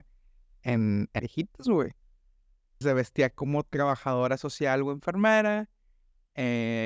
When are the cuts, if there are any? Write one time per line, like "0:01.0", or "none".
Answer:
0:01.2
0:02.8